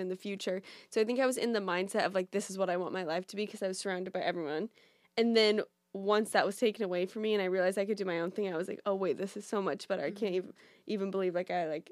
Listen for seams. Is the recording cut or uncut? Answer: uncut